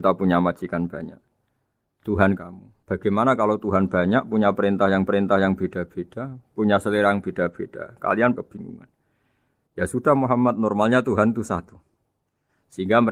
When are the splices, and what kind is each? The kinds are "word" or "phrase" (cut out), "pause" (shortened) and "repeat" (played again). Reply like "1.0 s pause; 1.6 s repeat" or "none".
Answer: 2.4 s phrase; 2.8 s pause; 5.1 s repeat; 8.3 s phrase